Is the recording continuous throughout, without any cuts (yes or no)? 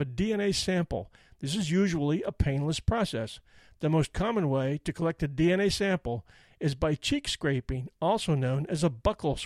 yes